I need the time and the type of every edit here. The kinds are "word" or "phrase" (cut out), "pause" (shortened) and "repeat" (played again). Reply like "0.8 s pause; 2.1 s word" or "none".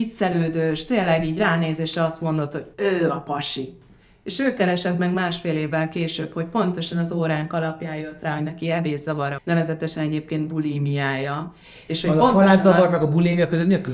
2.7 s word; 9.4 s word